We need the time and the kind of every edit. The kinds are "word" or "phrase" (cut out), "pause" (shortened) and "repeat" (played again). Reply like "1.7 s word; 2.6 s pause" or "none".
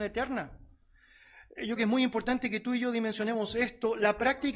1.8 s word